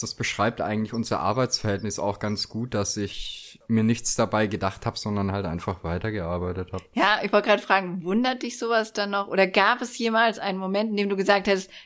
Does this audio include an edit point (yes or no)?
no